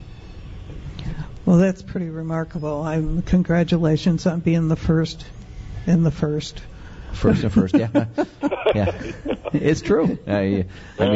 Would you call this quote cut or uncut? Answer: uncut